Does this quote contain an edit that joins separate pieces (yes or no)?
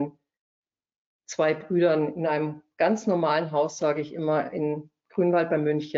no